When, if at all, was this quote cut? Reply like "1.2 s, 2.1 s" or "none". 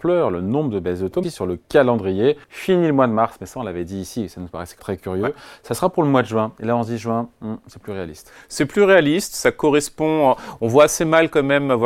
1.2 s, 2.4 s, 4.8 s